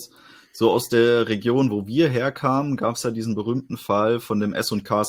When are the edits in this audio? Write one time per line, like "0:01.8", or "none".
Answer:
none